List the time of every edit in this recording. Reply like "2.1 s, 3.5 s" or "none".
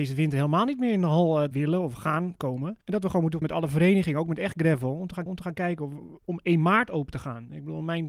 1.5 s, 2.8 s, 3.4 s, 5.3 s